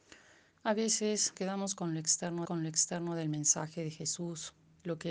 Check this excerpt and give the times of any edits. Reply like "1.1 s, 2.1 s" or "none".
1.3 s, 2.4 s